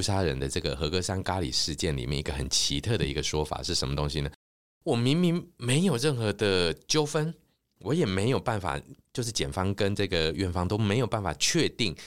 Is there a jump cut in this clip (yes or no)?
no